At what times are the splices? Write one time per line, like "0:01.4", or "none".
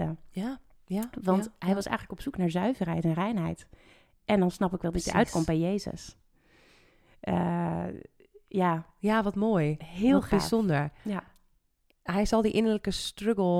0:11.0